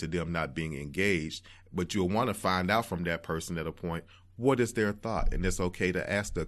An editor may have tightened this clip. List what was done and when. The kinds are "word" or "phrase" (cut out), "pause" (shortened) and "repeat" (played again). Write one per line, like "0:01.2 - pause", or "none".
none